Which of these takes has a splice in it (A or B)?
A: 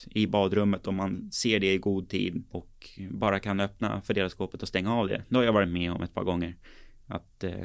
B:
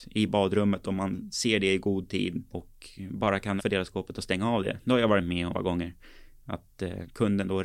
B